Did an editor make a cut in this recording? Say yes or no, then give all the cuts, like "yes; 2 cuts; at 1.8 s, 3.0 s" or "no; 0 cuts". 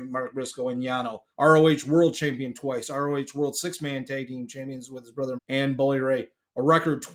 yes; 2 cuts; at 1.3 s, 5.4 s